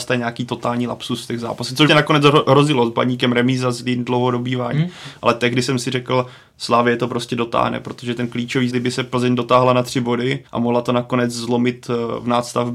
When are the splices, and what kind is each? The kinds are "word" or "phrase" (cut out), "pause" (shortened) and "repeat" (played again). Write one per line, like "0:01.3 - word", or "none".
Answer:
0:01.9 - word
0:08.7 - word
0:10.5 - pause